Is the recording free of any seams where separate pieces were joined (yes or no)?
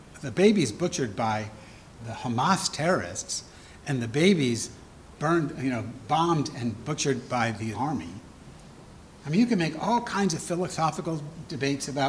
no